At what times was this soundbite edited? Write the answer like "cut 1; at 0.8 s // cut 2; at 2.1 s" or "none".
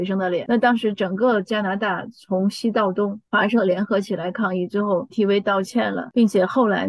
cut 1; at 5.1 s